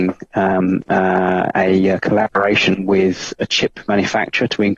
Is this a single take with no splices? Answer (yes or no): yes